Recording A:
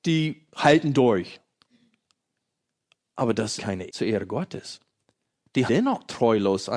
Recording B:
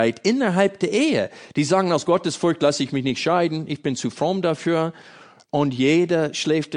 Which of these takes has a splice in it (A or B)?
A